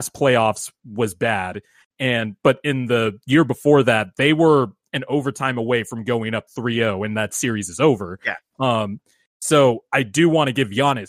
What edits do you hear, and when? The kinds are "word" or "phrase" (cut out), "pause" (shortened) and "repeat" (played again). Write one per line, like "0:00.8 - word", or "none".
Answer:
none